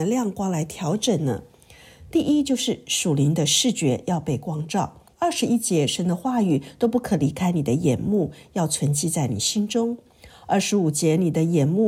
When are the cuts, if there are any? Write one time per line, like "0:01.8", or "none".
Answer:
0:05.1